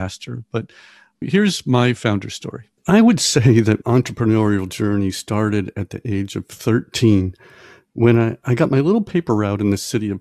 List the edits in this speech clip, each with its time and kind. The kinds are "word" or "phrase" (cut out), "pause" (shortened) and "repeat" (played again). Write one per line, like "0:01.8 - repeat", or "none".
0:01.2 - word
0:02.8 - pause
0:03.8 - word